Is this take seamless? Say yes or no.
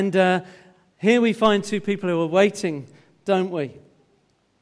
yes